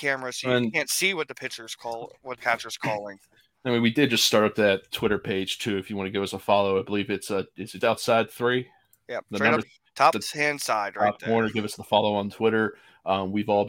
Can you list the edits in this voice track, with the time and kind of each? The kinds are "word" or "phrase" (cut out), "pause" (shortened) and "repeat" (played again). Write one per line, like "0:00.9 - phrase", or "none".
0:02.4 - word
0:07.8 - word
0:09.6 - word
0:10.1 - word

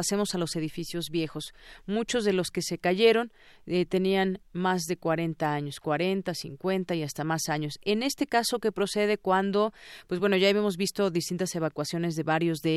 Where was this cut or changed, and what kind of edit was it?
none

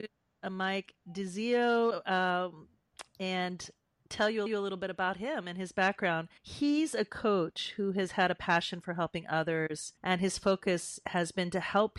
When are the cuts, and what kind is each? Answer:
0:01.0 - pause
0:04.5 - repeat
0:06.4 - pause
0:08.1 - word
0:10.0 - pause

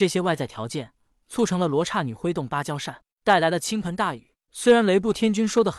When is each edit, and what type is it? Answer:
none

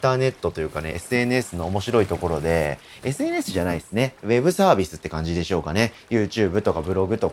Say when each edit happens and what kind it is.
none

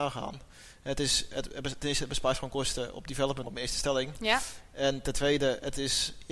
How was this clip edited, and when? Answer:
0:03.4 - phrase

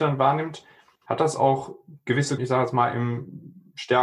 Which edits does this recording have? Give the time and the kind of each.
0:02.4 - word

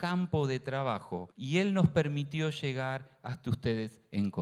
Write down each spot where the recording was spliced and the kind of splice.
0:01.3 - pause

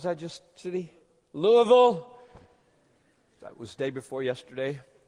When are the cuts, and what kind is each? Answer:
none

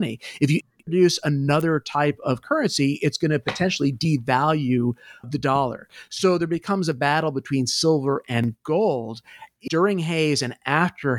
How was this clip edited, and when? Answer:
0:05.2 - word
0:09.7 - word

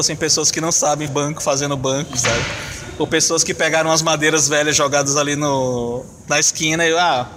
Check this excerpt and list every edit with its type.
0:01.1 - word

